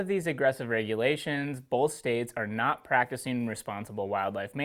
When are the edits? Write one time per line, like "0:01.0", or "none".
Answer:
none